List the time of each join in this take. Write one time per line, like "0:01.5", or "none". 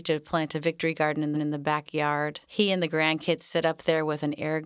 0:01.3
0:02.4